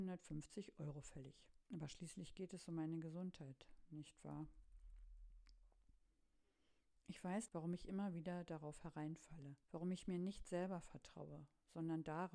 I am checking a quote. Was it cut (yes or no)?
yes